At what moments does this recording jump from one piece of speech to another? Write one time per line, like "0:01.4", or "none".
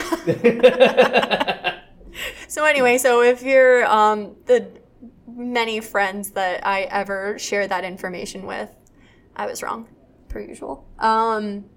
none